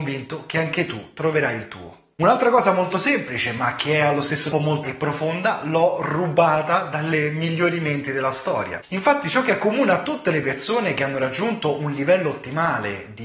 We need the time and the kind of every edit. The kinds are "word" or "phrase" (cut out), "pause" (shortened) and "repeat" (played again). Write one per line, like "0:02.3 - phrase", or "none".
0:04.5 - word
0:04.8 - word